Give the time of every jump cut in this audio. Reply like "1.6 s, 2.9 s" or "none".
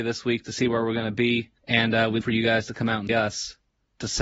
1.6 s, 2.2 s, 3.1 s